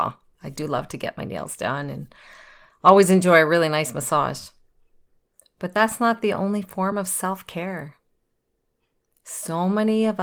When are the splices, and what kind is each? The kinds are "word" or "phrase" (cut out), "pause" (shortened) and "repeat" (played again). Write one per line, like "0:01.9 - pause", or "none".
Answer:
none